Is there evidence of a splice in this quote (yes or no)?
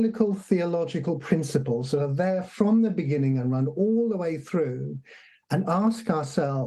no